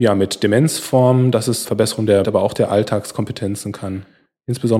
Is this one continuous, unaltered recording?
no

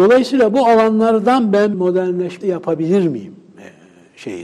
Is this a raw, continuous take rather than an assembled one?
no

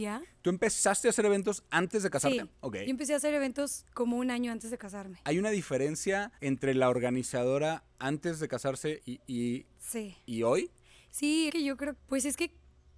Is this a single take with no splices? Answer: no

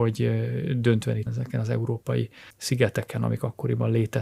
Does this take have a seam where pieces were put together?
yes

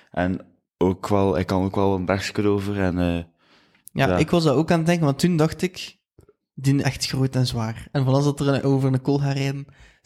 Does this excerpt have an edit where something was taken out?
yes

